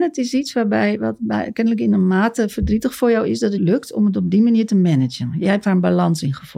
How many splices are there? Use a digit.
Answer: 1